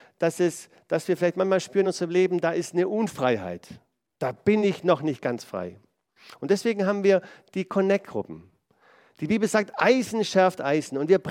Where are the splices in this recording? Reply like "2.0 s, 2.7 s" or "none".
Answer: none